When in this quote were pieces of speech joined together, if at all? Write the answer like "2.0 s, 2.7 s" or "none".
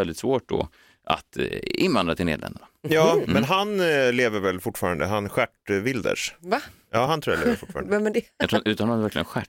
none